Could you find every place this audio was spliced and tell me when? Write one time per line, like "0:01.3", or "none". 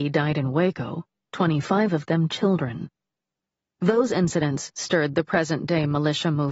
none